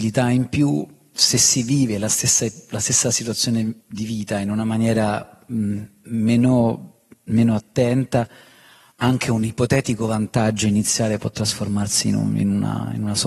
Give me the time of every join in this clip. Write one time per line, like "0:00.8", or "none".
0:03.8